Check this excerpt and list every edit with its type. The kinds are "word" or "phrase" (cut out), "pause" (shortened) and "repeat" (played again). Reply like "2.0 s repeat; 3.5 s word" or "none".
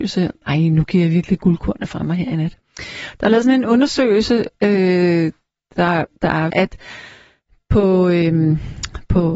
6.5 s word